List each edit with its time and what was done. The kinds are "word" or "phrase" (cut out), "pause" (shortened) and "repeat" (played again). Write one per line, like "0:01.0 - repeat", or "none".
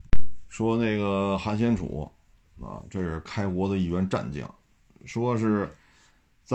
none